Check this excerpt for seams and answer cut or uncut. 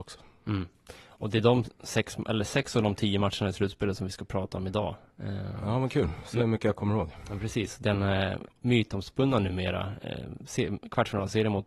uncut